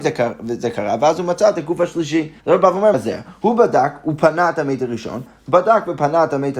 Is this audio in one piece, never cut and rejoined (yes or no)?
no